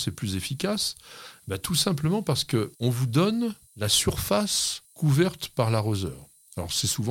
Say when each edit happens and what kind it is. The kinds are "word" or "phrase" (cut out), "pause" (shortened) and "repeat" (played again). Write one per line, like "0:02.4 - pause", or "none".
0:02.7 - pause
0:03.7 - pause
0:04.8 - pause